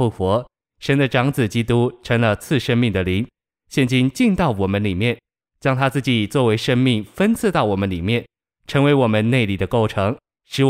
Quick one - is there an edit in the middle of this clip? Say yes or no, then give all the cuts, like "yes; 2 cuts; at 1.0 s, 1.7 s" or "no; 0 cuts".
no; 0 cuts